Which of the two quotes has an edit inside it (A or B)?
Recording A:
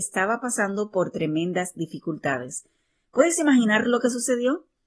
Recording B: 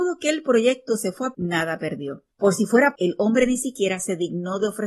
B